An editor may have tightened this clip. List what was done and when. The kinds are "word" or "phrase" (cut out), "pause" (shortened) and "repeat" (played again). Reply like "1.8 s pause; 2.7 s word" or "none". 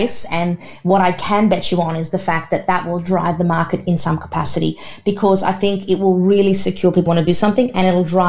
7.1 s phrase